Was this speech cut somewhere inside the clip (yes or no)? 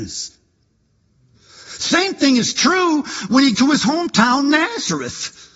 yes